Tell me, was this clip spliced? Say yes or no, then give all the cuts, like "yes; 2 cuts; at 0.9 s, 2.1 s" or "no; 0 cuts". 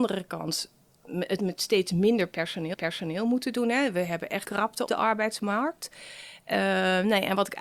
yes; 3 cuts; at 2.7 s, 4.4 s, 4.9 s